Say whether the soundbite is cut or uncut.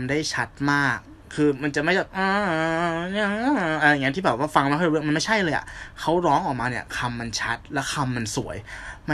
uncut